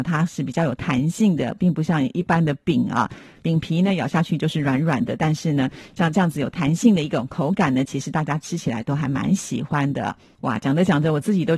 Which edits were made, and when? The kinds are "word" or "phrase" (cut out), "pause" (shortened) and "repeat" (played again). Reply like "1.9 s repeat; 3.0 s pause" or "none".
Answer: none